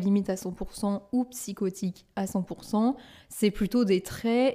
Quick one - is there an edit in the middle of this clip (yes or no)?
no